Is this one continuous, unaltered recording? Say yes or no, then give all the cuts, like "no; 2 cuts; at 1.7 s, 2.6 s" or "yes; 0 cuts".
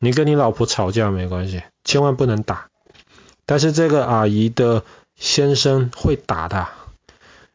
yes; 0 cuts